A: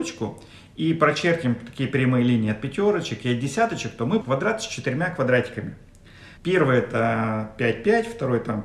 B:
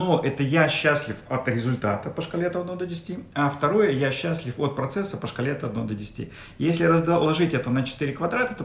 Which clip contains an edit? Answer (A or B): A